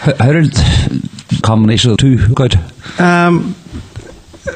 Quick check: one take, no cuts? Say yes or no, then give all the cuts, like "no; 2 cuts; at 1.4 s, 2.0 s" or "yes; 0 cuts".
no; 3 cuts; at 1.4 s, 2.0 s, 2.3 s